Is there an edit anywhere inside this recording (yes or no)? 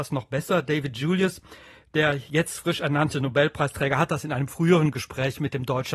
no